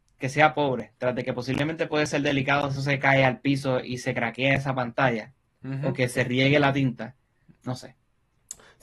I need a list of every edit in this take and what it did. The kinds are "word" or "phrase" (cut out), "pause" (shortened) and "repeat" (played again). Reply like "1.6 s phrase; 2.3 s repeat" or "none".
2.8 s word; 7.6 s word